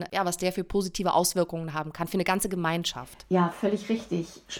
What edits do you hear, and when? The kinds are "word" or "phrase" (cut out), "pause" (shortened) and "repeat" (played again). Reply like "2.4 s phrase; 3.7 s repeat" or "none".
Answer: none